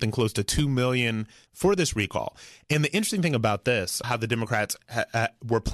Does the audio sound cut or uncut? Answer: cut